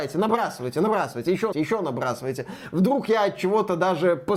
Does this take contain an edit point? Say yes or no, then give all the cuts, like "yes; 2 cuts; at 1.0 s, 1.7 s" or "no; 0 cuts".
yes; 1 cut; at 1.5 s